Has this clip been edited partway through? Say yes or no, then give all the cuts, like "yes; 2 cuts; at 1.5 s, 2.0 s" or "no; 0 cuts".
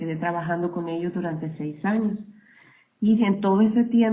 no; 0 cuts